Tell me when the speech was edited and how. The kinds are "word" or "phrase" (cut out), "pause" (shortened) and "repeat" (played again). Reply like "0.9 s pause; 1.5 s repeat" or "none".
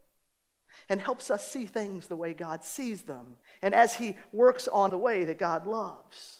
3.4 s pause; 4.9 s phrase